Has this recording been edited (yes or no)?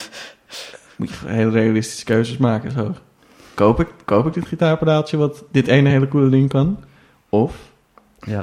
no